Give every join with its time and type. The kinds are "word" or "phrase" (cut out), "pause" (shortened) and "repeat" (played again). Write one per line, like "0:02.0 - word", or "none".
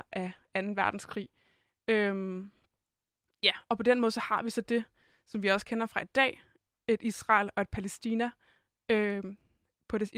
none